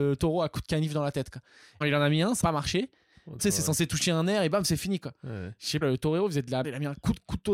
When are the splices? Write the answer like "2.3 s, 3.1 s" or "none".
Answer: 1.8 s, 2.4 s, 3.4 s, 5.8 s, 6.6 s